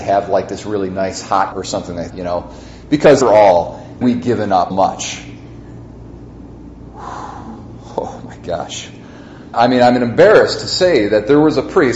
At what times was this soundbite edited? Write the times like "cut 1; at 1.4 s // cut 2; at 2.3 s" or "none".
cut 1; at 1.5 s // cut 2; at 2.1 s // cut 3; at 3.2 s // cut 4; at 4.0 s // cut 5; at 4.7 s // cut 6; at 9.5 s